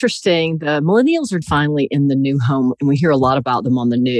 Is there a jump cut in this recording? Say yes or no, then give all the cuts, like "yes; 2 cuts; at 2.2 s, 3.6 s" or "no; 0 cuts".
yes; 2 cuts; at 1.4 s, 2.8 s